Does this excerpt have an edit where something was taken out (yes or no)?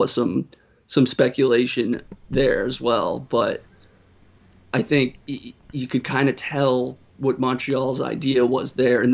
yes